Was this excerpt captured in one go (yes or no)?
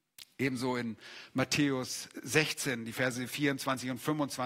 yes